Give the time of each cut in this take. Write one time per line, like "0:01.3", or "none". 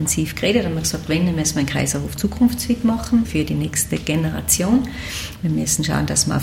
0:03.2